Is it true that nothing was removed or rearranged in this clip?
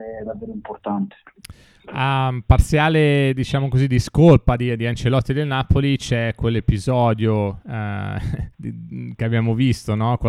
no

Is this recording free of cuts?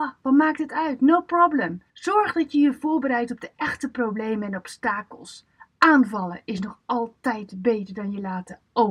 no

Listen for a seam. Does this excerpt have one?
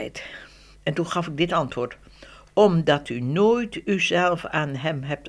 no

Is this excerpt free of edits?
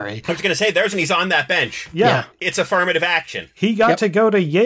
no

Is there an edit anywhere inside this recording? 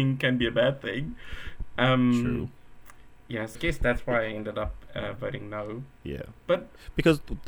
yes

